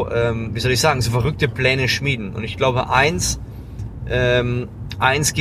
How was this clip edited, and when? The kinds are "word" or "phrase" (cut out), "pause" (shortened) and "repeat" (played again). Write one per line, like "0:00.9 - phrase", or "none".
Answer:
none